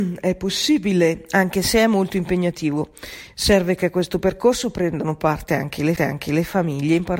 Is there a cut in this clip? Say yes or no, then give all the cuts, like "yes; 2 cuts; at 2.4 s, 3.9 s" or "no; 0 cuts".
yes; 1 cut; at 6.0 s